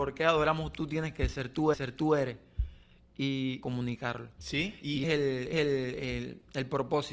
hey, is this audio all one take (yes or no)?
no